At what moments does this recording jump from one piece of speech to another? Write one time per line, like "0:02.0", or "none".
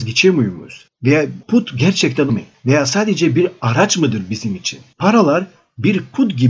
0:01.4
0:02.3